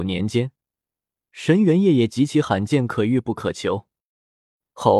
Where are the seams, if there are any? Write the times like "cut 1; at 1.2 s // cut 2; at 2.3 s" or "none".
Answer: none